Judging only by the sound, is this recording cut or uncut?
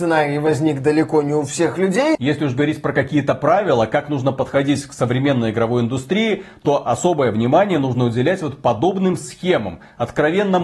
uncut